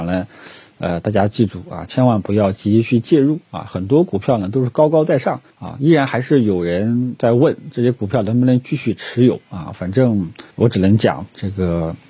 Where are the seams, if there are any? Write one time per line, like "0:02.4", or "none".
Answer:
0:05.5
0:10.5